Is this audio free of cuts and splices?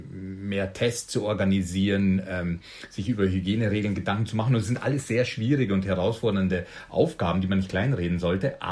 yes; 0 cuts

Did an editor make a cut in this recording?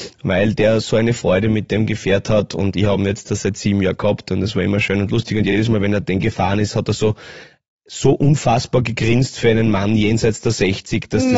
no; 0 cuts

